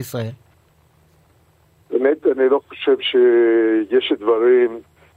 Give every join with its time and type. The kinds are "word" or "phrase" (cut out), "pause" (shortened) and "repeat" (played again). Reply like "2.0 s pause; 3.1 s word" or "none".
none